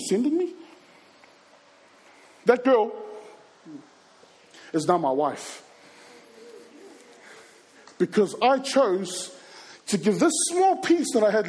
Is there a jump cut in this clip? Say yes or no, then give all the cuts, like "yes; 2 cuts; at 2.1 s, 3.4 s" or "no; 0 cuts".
no; 0 cuts